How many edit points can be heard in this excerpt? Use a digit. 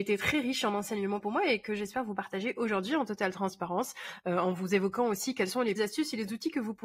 1